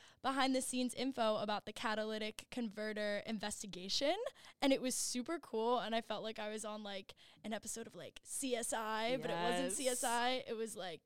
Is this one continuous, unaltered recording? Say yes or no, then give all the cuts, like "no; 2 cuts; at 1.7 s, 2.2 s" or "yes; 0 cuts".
yes; 0 cuts